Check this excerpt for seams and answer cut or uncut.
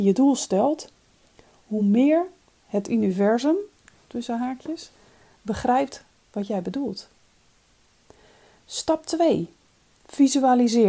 uncut